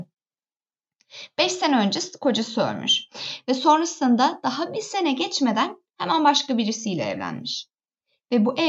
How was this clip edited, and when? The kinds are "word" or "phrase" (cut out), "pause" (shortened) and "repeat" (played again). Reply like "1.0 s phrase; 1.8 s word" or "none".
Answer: none